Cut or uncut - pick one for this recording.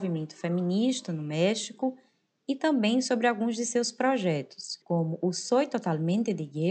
cut